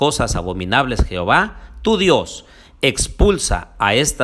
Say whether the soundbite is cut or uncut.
uncut